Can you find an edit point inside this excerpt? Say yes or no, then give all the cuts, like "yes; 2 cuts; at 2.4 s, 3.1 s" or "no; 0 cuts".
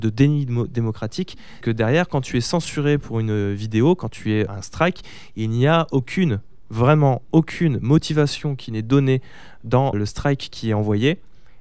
yes; 3 cuts; at 1.6 s, 4.5 s, 9.9 s